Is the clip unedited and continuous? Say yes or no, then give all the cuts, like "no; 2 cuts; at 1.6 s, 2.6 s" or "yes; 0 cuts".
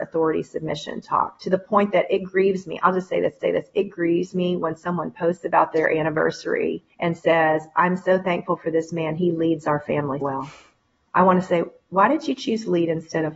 no; 3 cuts; at 3.4 s, 6.9 s, 10.2 s